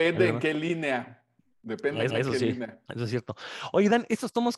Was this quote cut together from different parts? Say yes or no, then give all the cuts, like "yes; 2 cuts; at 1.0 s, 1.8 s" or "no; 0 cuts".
yes; 2 cuts; at 2.1 s, 2.8 s